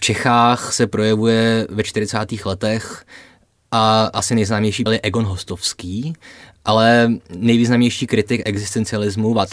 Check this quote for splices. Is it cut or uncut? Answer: cut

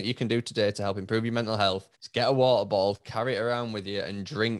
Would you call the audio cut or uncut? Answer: cut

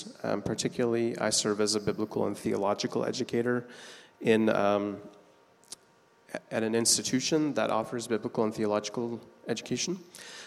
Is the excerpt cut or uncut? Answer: uncut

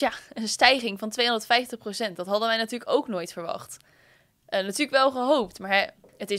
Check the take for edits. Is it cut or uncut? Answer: uncut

